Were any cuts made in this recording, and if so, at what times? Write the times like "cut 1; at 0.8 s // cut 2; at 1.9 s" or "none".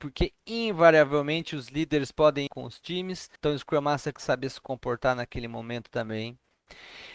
cut 1; at 2.5 s // cut 2; at 3.4 s // cut 3; at 4.2 s